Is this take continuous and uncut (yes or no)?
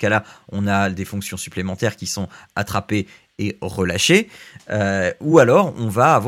yes